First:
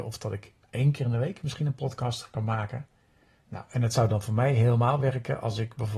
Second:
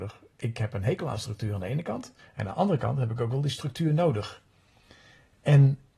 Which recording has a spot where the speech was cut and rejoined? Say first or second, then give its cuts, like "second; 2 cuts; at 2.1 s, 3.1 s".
second; 1 cut; at 2.2 s